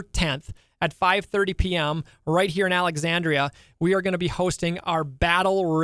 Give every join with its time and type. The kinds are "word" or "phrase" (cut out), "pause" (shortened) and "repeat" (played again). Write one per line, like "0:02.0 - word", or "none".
none